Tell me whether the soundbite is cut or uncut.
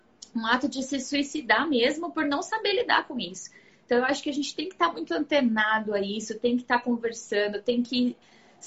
uncut